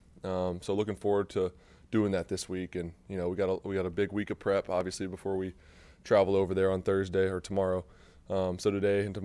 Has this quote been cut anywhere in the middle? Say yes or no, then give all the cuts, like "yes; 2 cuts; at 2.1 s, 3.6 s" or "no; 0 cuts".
no; 0 cuts